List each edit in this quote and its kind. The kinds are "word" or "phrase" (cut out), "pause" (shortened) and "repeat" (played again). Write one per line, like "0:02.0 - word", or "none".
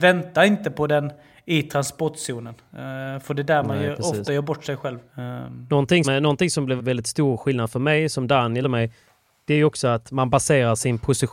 0:04.3 - word
0:06.0 - word
0:06.8 - word
0:08.6 - word

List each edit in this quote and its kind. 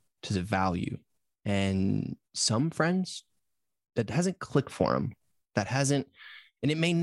none

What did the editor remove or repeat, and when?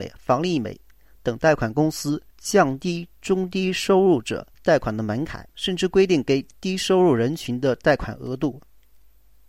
0:02.3 - pause
0:04.5 - pause
0:05.5 - pause

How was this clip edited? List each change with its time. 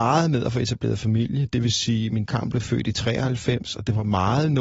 0:02.3 - word

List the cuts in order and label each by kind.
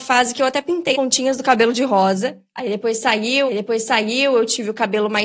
0:00.9 - word
0:03.5 - repeat

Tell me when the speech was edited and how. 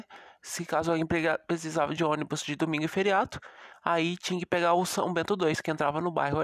none

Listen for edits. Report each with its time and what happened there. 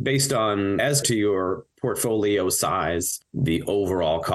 0:01.0 - word

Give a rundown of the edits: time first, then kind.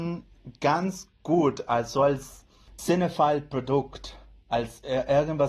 0:02.8 - word

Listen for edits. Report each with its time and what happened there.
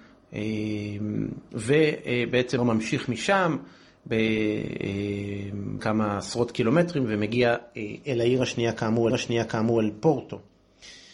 0:02.6 - word
0:05.8 - word
0:09.1 - repeat

